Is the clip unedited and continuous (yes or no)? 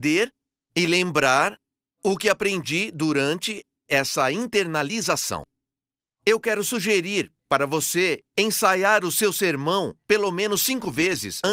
yes